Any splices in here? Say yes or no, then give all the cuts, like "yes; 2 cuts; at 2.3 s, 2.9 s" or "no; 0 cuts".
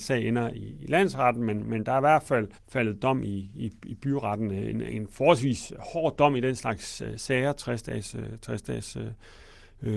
yes; 1 cut; at 2.5 s